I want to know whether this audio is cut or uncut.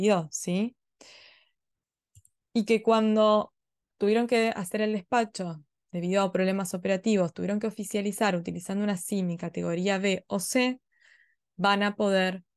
uncut